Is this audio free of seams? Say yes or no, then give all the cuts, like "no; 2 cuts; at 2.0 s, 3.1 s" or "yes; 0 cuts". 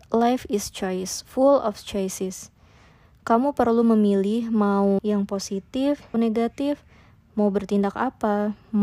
no; 2 cuts; at 5.0 s, 6.1 s